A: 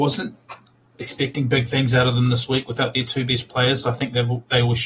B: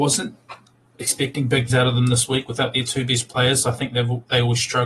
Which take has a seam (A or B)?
B